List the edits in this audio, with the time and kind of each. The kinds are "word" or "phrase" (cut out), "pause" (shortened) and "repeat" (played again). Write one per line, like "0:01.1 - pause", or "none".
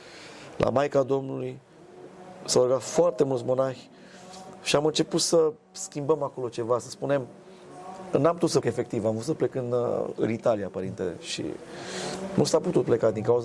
0:08.6 - word